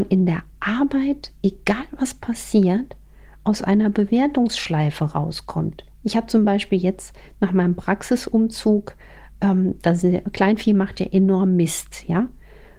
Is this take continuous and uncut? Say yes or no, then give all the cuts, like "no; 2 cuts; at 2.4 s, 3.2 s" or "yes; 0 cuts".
yes; 0 cuts